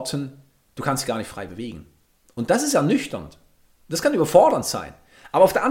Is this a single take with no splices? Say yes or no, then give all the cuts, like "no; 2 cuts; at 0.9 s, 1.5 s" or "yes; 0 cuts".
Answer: yes; 0 cuts